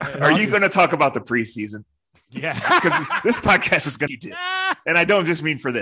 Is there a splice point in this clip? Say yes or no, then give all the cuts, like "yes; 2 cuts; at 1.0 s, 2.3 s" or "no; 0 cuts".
yes; 1 cut; at 4.1 s